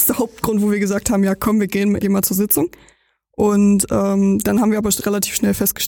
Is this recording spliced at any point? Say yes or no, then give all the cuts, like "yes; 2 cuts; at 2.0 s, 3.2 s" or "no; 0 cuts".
yes; 1 cut; at 2.0 s